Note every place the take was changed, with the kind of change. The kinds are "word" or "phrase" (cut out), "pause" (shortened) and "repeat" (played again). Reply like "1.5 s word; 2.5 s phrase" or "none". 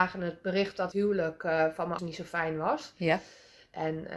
0.9 s word; 2.0 s word

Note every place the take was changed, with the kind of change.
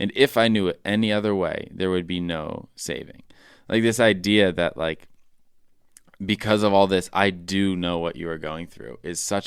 none

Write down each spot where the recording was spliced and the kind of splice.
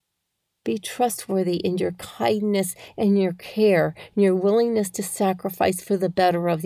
none

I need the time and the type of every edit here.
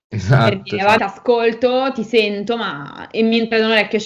1.0 s word

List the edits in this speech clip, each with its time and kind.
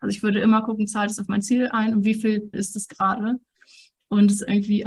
2.5 s word

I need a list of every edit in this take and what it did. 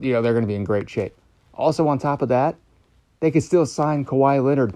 none

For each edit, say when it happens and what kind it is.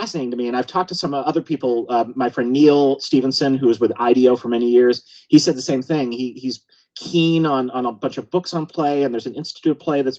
none

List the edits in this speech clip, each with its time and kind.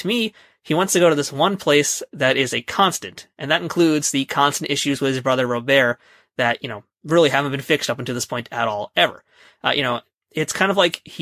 none

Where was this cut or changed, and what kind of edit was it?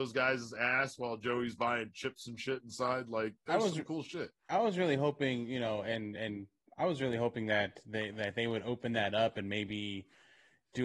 none

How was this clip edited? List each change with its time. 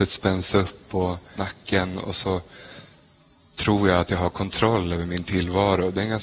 none

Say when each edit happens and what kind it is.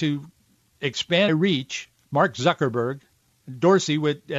1.3 s word; 3.3 s pause

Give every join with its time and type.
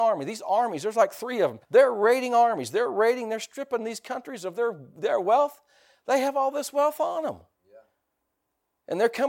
1.6 s pause

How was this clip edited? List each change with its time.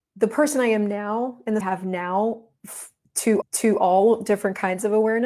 1.6 s phrase; 3.4 s repeat

